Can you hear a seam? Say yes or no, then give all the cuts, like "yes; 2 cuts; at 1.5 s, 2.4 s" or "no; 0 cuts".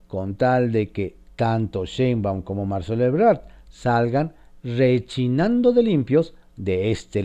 no; 0 cuts